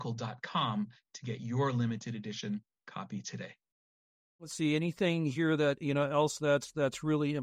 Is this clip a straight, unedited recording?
yes; 0 cuts

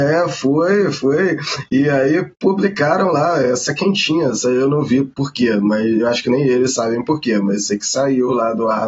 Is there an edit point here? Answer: no; 0 cuts

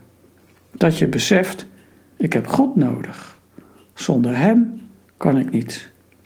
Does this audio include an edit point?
no; 0 cuts

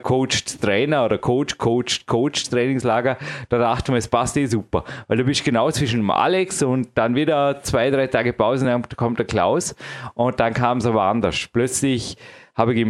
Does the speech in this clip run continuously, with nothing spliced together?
yes; 0 cuts

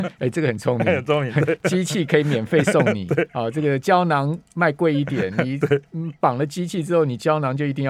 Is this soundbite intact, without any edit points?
yes; 0 cuts

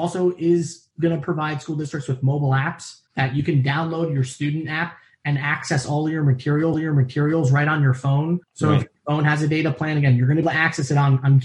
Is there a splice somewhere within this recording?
yes; 4 cuts; at 3.1 s, 6.7 s, 8.4 s, 10.4 s

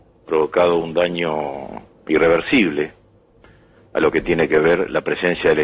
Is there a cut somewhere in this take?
no; 0 cuts

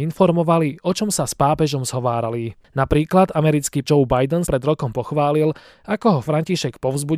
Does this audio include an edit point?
yes; 2 cuts; at 3.8 s, 4.5 s

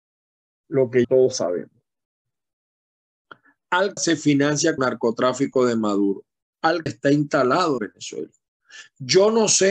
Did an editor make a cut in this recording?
yes; 5 cuts; at 1.0 s, 4.0 s, 4.8 s, 6.9 s, 7.8 s

